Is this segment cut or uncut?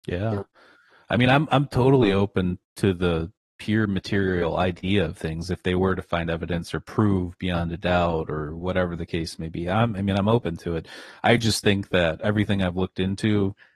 uncut